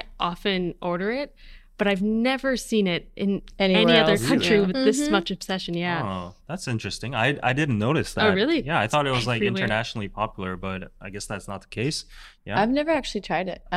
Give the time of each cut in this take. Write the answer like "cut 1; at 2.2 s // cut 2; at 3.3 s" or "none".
none